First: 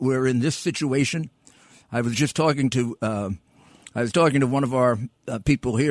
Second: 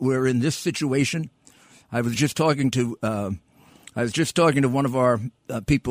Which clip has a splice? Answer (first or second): first